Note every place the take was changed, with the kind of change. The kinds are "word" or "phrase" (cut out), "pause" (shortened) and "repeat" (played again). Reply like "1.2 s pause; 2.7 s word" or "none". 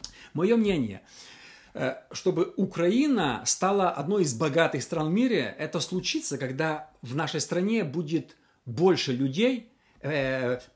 none